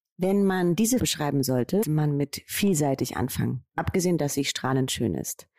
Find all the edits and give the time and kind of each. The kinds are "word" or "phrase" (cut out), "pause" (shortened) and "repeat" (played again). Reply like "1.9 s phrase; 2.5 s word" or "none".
1.0 s word; 1.8 s word; 4.2 s word